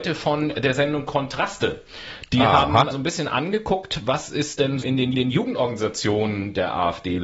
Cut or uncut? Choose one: cut